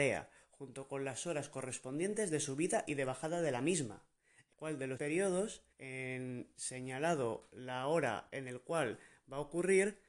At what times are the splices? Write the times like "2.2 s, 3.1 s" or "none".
4.5 s, 5.0 s, 5.7 s